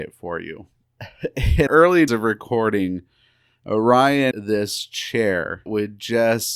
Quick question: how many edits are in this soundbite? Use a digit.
4